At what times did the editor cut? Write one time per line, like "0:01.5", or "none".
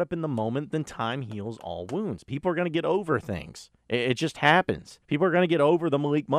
0:03.8
0:05.0